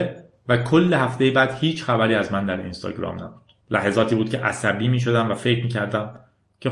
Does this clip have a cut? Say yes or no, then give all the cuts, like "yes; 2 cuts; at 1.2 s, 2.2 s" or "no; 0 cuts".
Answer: yes; 1 cut; at 3.6 s